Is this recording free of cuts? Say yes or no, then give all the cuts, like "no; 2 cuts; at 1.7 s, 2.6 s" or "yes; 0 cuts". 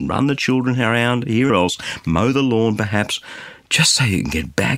no; 1 cut; at 1.5 s